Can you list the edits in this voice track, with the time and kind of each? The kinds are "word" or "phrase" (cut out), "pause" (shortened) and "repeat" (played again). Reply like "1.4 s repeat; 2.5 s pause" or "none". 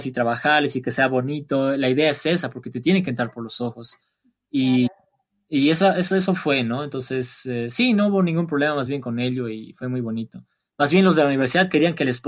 none